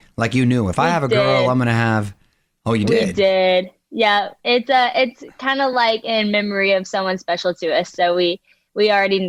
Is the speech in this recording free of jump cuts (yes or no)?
yes